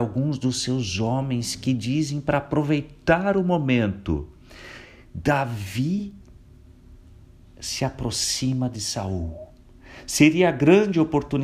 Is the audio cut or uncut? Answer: uncut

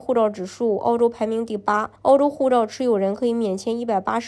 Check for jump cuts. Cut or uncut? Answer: cut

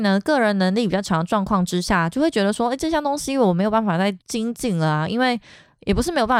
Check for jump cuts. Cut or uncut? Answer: cut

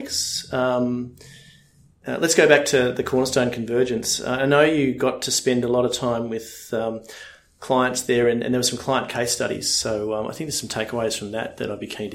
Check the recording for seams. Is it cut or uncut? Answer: uncut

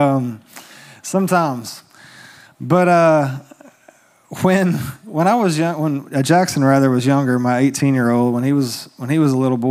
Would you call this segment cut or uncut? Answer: uncut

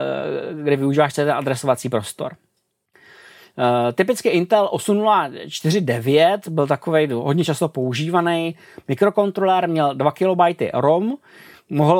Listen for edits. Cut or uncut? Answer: uncut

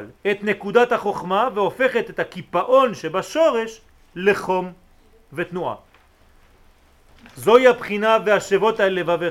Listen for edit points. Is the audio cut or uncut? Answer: uncut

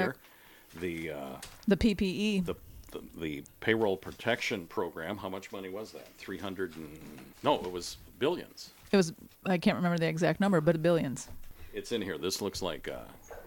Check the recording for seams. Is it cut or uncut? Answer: cut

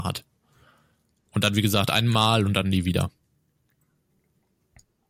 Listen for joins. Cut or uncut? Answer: uncut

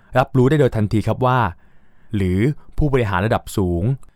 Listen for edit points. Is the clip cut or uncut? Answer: cut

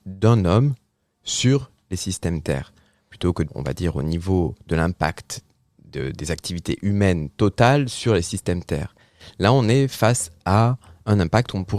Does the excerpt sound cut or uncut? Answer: cut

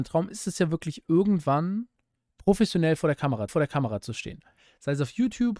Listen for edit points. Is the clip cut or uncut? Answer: cut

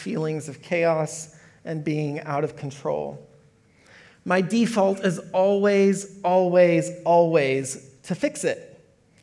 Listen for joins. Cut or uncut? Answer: uncut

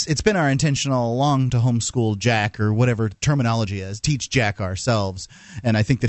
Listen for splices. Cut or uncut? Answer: uncut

